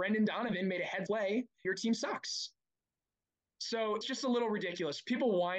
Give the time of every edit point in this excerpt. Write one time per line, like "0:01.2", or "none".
0:01.1
0:01.6
0:04.0